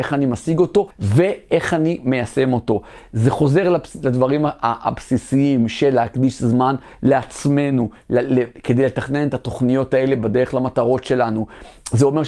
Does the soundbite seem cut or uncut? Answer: cut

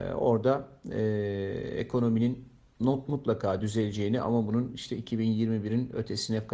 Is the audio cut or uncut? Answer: uncut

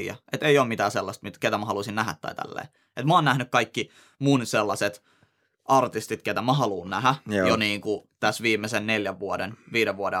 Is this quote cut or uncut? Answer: uncut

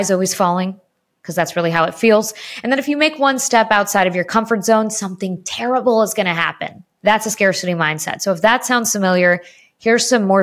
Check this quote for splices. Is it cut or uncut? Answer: uncut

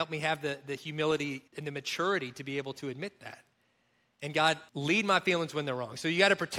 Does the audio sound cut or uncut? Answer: cut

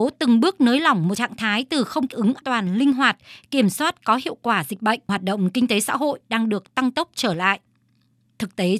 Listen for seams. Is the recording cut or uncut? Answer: cut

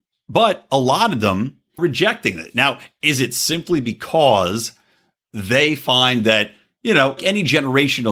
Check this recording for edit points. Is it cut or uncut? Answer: cut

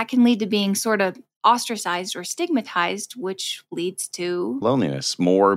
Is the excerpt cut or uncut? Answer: cut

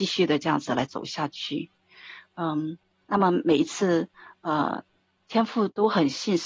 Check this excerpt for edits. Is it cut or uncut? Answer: uncut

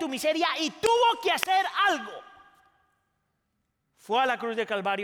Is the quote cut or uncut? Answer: uncut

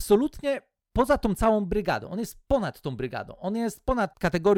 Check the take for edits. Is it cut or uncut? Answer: uncut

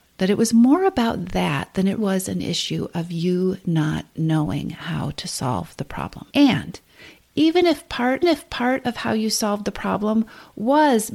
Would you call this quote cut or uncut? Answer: cut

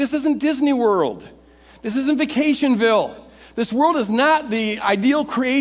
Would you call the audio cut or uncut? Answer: uncut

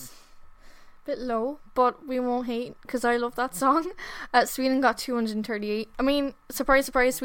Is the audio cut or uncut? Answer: uncut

